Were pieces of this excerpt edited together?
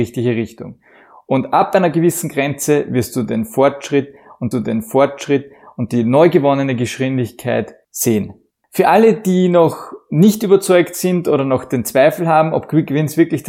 yes; 1 cut; at 4.5 s

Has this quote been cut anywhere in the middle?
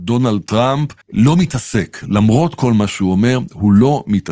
yes; 1 cut; at 1.0 s

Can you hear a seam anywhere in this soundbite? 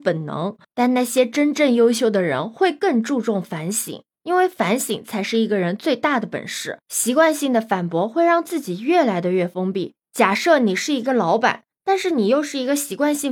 no; 0 cuts

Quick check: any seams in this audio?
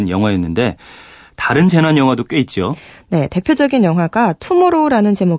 no; 0 cuts

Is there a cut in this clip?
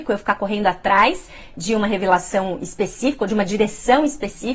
no; 0 cuts

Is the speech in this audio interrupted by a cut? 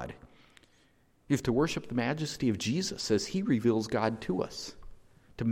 no; 0 cuts

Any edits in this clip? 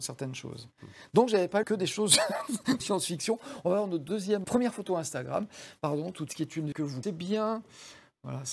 yes; 6 cuts; at 1.6 s, 2.8 s, 4.4 s, 6.3 s, 6.7 s, 7.0 s

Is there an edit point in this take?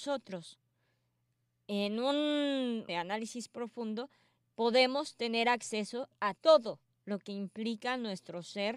yes; 2 cuts; at 2.9 s, 6.4 s

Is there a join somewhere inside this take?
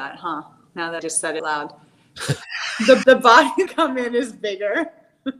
yes; 4 cuts; at 1.0 s, 1.4 s, 3.0 s, 3.7 s

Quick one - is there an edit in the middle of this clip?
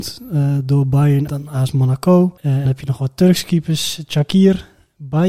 yes; 2 cuts; at 1.3 s, 2.7 s

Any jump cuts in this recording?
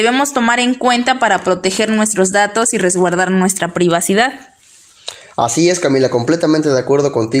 no; 0 cuts

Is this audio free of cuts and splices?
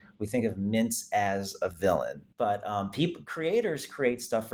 no; 1 cut; at 2.3 s

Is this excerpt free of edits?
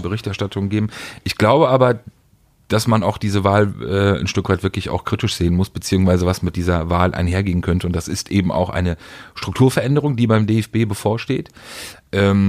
yes; 0 cuts

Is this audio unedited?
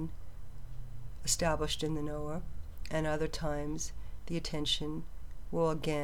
yes; 0 cuts

